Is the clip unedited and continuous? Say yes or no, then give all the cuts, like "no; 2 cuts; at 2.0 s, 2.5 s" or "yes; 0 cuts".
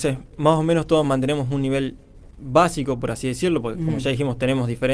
yes; 0 cuts